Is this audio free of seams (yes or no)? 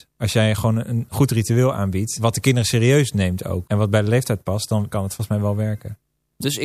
yes